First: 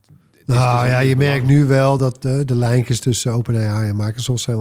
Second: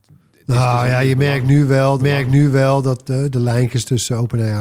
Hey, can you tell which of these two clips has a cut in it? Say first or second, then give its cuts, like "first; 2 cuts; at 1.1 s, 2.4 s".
second; 1 cut; at 2.0 s